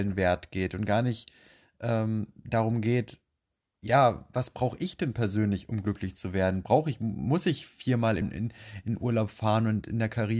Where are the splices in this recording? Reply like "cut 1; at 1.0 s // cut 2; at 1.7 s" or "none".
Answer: cut 1; at 8.2 s